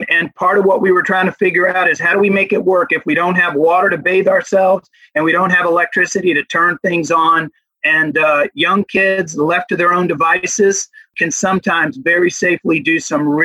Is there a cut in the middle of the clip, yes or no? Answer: no